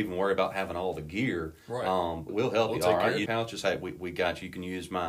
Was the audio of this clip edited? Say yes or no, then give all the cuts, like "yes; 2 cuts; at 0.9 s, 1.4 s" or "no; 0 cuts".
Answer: yes; 2 cuts; at 2.3 s, 3.3 s